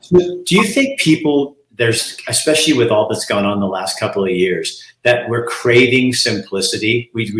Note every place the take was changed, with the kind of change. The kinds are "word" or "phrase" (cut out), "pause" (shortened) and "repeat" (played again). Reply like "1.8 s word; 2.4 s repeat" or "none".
none